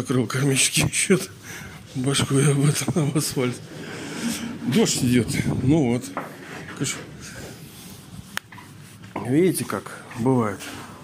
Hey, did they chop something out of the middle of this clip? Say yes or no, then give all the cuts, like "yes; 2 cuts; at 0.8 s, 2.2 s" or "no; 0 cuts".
no; 0 cuts